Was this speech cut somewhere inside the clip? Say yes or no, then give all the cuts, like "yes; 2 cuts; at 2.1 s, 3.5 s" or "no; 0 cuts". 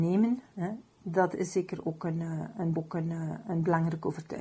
yes; 1 cut; at 2.7 s